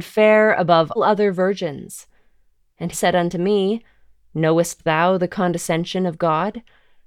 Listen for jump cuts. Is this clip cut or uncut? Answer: cut